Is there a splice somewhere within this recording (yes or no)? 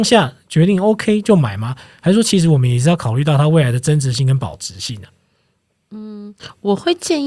no